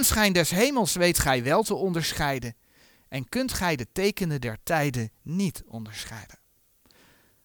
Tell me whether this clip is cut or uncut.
uncut